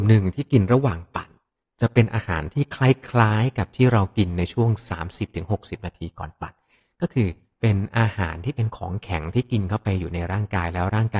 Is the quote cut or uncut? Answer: uncut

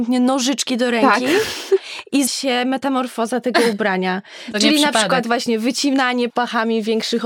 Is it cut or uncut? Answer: cut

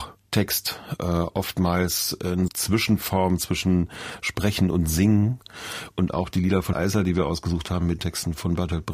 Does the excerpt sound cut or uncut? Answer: cut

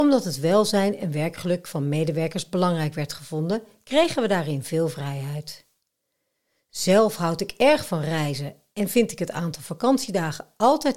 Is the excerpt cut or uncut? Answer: uncut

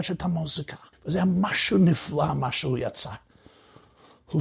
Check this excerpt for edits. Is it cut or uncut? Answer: cut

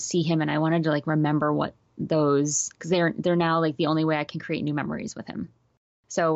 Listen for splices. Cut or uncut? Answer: cut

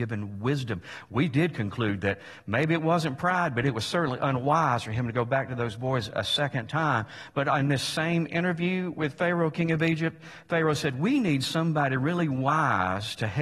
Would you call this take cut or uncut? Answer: uncut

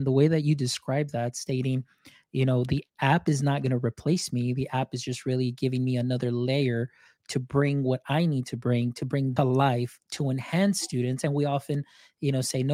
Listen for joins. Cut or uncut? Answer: cut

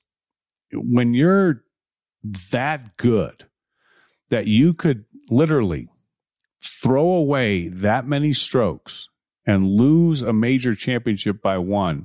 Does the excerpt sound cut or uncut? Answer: uncut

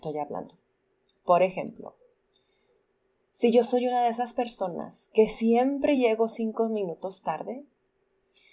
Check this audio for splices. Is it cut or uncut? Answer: uncut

